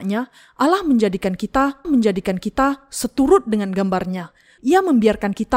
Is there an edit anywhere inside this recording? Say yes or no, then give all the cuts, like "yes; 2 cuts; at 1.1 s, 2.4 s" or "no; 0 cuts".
yes; 2 cuts; at 1.8 s, 4.6 s